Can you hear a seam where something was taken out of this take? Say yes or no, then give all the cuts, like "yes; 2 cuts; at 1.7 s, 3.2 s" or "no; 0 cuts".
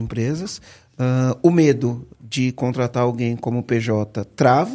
no; 0 cuts